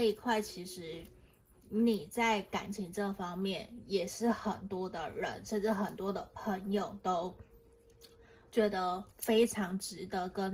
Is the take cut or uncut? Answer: cut